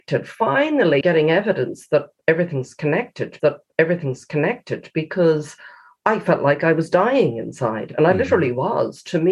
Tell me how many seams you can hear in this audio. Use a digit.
2